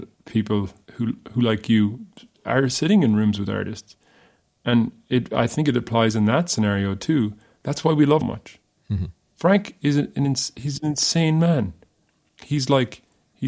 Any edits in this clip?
yes; 1 cut; at 8.2 s

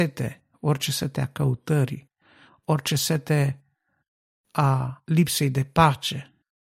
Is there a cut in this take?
no; 0 cuts

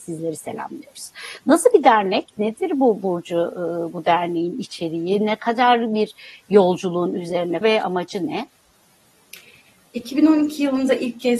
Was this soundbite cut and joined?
yes; 1 cut; at 7.6 s

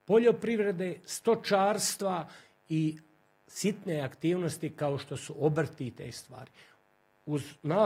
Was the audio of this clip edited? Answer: no; 0 cuts

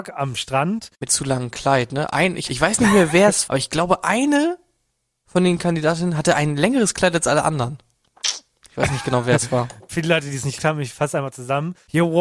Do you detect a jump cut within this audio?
yes; 4 cuts; at 1.1 s, 2.5 s, 3.5 s, 10.6 s

